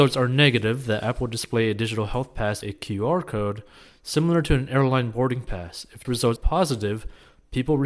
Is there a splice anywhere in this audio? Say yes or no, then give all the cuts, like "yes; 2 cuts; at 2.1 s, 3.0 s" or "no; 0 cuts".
yes; 3 cuts; at 2.6 s, 6.0 s, 6.4 s